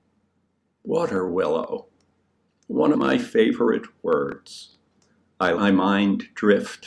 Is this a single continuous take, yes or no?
no